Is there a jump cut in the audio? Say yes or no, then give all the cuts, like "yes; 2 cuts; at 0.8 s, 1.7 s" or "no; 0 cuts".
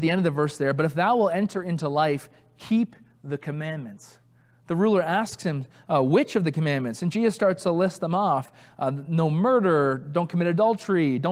no; 0 cuts